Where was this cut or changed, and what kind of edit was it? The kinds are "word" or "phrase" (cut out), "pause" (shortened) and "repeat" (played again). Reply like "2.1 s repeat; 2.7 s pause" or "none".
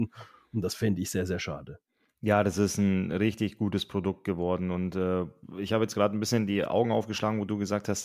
none